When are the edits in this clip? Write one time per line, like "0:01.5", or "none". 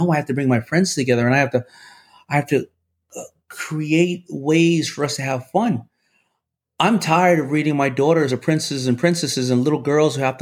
0:08.3